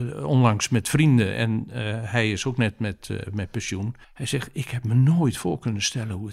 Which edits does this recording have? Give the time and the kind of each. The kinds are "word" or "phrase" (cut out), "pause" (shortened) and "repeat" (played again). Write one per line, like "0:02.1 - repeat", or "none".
0:04.0 - pause